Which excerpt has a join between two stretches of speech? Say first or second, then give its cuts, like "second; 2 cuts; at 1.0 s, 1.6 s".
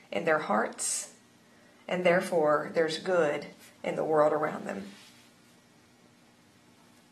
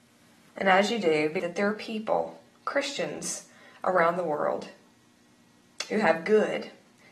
second; 1 cut; at 1.4 s